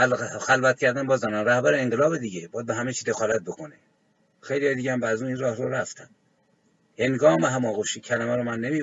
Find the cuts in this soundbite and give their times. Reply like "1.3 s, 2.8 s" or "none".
none